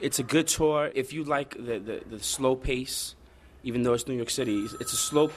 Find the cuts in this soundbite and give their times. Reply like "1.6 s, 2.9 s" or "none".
none